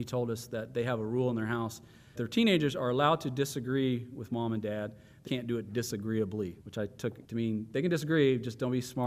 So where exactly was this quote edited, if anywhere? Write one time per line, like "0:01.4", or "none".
0:02.1
0:05.3
0:06.6
0:07.2